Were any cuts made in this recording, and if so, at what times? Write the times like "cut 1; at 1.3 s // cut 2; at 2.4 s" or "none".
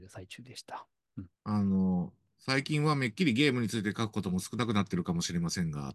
cut 1; at 1.3 s